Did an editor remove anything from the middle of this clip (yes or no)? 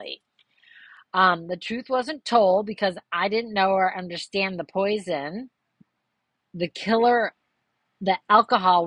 no